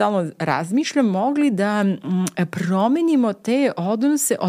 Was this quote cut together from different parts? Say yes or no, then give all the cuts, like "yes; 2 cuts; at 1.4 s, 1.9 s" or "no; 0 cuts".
no; 0 cuts